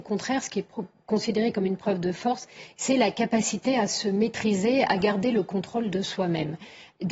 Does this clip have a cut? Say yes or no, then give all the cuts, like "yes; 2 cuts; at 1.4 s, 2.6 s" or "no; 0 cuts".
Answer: no; 0 cuts